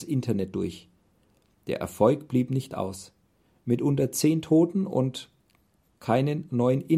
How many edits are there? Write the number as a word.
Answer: zero